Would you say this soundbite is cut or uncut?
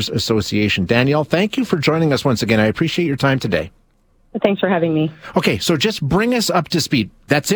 uncut